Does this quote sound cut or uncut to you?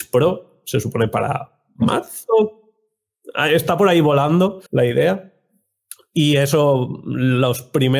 cut